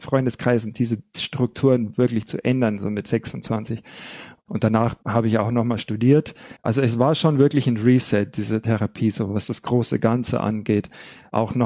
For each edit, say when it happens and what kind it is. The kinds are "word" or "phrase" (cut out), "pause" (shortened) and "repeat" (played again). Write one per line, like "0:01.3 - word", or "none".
0:06.6 - pause